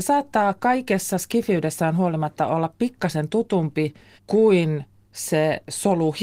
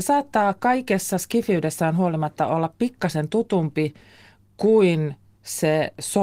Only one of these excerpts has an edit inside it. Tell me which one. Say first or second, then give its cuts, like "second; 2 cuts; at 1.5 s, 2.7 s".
first; 1 cut; at 4.2 s